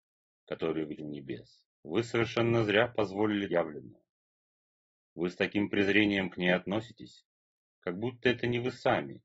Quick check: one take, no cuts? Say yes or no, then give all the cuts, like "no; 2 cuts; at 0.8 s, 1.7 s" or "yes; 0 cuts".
no; 3 cuts; at 1.0 s, 1.7 s, 3.5 s